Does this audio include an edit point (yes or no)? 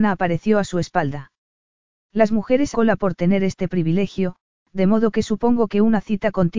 yes